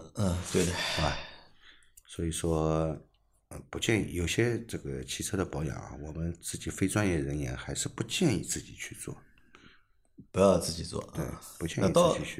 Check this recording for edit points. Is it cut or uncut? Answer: uncut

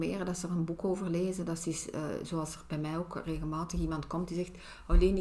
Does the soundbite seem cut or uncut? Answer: uncut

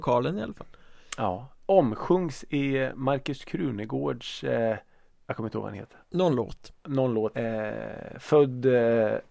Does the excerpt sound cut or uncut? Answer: cut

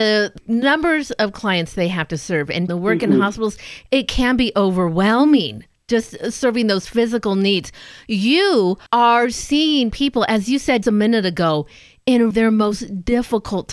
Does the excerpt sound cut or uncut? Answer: cut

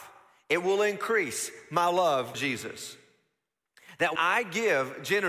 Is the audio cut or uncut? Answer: cut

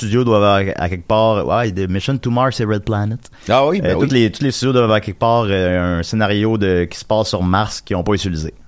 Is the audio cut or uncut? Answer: uncut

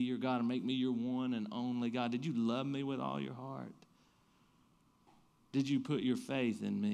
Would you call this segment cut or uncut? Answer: uncut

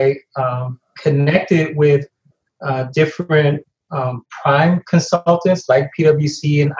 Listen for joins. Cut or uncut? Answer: uncut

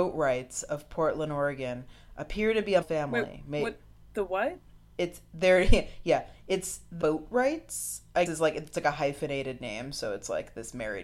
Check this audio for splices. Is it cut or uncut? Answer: cut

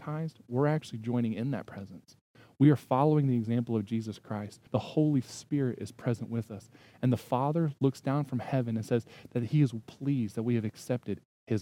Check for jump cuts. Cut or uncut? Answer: cut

